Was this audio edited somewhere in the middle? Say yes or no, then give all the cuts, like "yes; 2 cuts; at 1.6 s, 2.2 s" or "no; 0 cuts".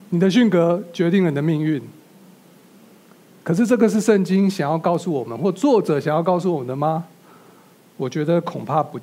no; 0 cuts